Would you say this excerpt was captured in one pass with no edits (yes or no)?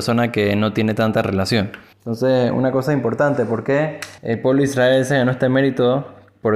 no